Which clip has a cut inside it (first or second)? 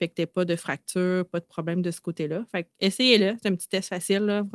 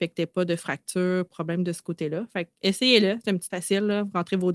second